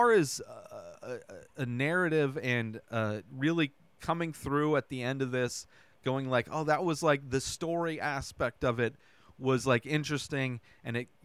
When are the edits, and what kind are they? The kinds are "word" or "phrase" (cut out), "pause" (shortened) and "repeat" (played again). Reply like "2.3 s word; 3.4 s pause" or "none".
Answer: none